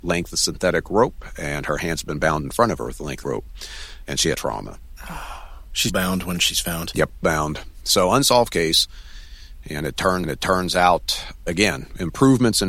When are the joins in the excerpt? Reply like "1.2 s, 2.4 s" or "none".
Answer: 3.2 s, 4.3 s, 5.9 s, 7.2 s, 10.2 s